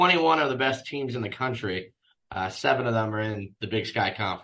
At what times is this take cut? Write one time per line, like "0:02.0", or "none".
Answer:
none